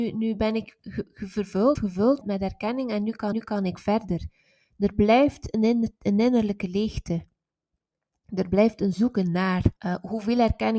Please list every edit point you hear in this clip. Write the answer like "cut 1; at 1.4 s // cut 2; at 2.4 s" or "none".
cut 1; at 1.8 s // cut 2; at 2.2 s // cut 3; at 3.3 s // cut 4; at 9.8 s

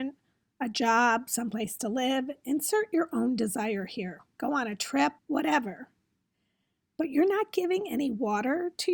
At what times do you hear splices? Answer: cut 1; at 5.2 s

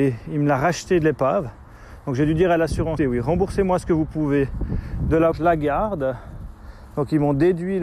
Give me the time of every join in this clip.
cut 1; at 3.0 s // cut 2; at 5.3 s

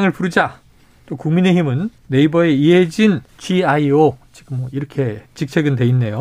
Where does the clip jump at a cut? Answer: cut 1; at 2.0 s // cut 2; at 3.3 s // cut 3; at 5.3 s

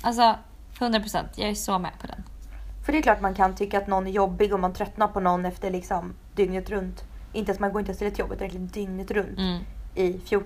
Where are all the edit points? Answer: none

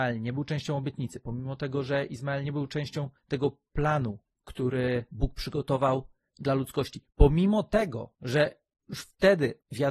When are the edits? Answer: cut 1; at 3.2 s

